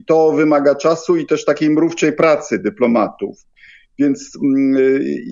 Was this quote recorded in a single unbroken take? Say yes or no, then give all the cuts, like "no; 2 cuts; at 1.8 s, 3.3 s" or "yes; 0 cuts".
yes; 0 cuts